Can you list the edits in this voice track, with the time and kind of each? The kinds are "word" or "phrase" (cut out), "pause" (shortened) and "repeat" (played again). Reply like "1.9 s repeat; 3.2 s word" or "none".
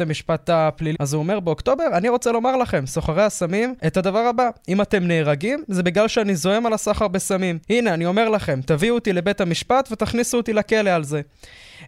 0.9 s word; 3.8 s pause; 7.6 s pause